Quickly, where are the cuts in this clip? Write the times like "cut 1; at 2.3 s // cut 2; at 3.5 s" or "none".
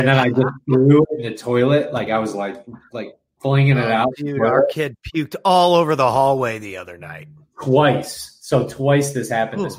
none